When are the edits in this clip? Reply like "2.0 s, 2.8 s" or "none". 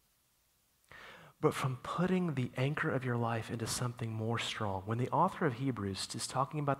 none